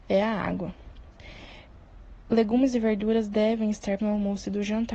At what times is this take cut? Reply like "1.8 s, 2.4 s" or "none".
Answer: 4.0 s